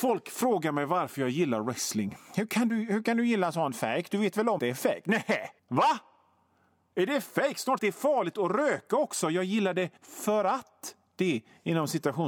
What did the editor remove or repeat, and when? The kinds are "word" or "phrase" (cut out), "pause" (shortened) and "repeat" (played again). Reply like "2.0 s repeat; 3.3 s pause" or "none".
4.6 s word; 5.6 s pause; 7.8 s phrase; 10.0 s pause